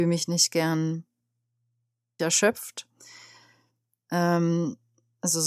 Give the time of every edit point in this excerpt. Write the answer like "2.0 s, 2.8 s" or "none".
2.2 s

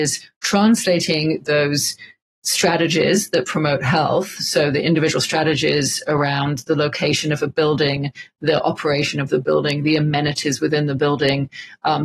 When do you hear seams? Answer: none

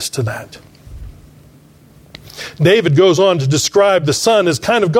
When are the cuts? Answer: none

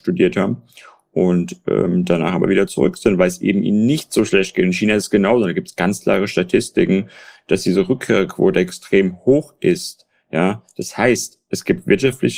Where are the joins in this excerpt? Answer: none

